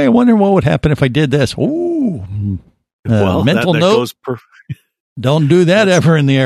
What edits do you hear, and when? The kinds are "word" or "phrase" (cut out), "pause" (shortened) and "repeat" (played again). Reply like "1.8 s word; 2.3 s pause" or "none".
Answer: none